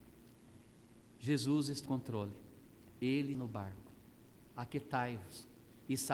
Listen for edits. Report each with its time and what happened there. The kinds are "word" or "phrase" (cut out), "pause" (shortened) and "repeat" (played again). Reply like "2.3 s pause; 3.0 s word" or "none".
1.9 s word; 3.3 s word